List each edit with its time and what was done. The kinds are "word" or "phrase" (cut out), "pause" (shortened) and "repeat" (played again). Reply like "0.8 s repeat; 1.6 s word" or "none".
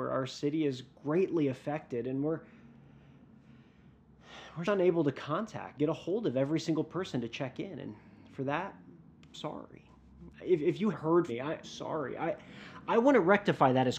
4.6 s word; 5.8 s word; 9.3 s word; 10.3 s word; 10.9 s word; 11.3 s word; 11.6 s word